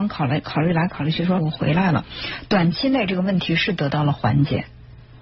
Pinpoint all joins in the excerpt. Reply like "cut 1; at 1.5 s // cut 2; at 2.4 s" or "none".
cut 1; at 1.4 s